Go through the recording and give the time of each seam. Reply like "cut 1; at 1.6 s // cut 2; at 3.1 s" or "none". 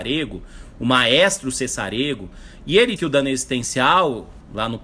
cut 1; at 3.0 s